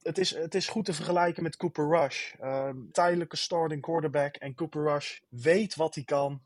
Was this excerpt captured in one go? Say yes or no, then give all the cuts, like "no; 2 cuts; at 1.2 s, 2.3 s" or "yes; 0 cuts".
no; 2 cuts; at 2.9 s, 5.2 s